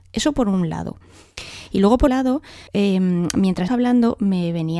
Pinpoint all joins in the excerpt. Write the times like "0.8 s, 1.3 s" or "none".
2.1 s, 2.7 s, 3.7 s